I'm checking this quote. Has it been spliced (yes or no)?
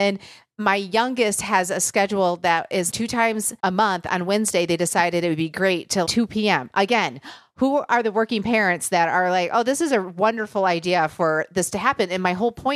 yes